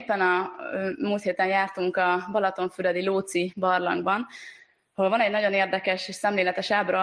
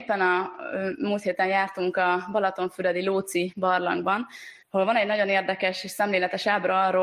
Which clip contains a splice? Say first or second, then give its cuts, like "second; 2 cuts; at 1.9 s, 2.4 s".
second; 1 cut; at 4.6 s